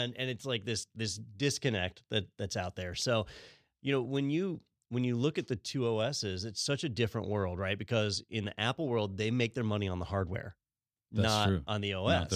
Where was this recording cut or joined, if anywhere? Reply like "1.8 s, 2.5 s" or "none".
none